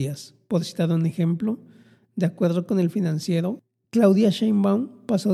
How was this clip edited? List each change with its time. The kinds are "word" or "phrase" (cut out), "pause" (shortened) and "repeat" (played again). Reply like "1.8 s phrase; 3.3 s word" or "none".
none